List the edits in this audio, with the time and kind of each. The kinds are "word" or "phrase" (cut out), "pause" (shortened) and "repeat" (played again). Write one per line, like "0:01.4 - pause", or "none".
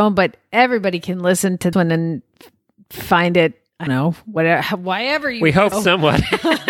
0:01.7 - word
0:03.9 - word
0:05.7 - word